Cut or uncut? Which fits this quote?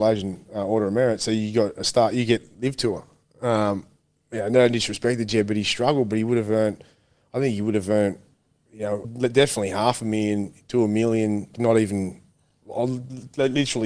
cut